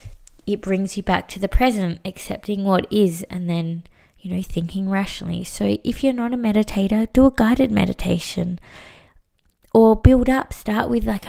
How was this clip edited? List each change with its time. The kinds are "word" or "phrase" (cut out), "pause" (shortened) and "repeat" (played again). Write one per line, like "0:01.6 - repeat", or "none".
none